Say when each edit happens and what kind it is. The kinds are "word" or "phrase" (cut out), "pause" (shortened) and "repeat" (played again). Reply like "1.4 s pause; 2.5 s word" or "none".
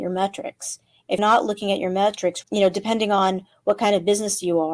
1.2 s word; 2.4 s word